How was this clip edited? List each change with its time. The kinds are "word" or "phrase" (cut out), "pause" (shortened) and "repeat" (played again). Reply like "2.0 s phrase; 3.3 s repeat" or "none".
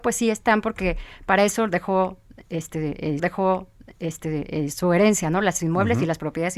3.2 s repeat; 5.6 s word